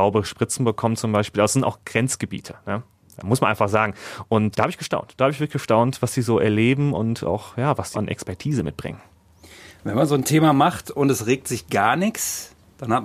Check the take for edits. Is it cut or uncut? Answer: cut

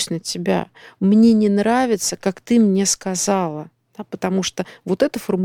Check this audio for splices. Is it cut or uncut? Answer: uncut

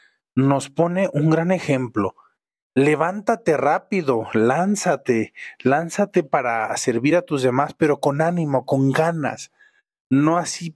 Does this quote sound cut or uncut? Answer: uncut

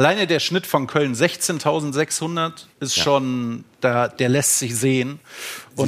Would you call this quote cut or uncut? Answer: cut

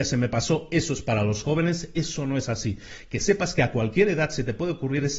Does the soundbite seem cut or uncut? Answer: uncut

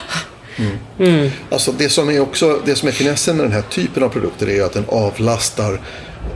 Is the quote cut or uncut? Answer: uncut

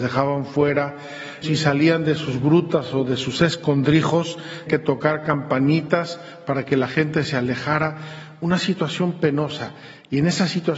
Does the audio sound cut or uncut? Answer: cut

